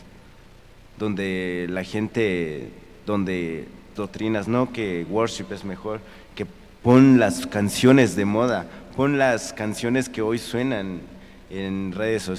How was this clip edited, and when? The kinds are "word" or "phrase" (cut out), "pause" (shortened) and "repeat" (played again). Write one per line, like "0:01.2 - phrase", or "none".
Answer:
0:04.0 - word